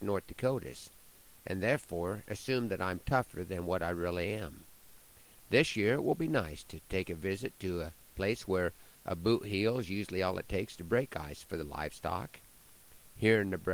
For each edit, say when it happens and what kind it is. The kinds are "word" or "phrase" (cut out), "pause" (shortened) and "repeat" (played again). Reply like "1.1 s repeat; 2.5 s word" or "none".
none